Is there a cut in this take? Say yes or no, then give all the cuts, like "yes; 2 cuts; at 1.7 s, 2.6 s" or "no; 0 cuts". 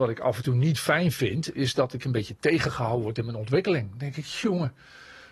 no; 0 cuts